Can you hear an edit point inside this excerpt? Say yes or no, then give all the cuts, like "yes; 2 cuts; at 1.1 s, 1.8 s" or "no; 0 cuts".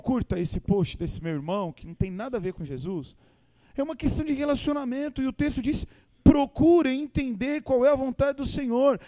no; 0 cuts